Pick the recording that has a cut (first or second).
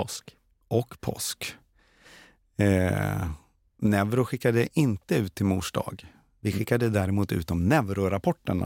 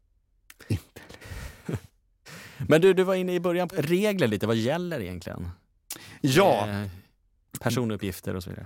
second